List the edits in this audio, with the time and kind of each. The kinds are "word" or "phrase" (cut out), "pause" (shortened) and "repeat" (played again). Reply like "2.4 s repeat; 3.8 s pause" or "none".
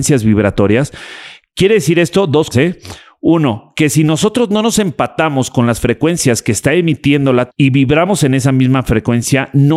2.5 s word; 7.5 s word